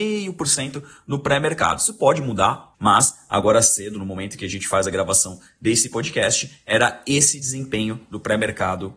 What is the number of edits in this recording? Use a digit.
1